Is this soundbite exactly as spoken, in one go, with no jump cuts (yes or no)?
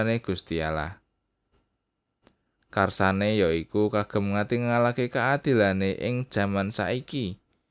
yes